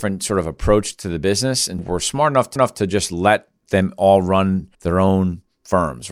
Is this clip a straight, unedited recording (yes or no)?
no